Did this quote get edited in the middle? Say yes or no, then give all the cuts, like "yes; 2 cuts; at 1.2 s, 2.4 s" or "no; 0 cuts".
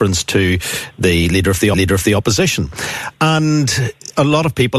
yes; 1 cut; at 1.7 s